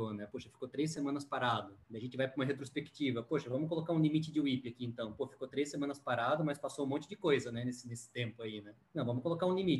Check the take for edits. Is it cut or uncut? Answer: cut